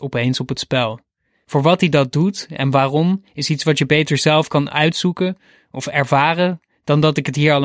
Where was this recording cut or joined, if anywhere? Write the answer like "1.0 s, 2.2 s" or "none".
none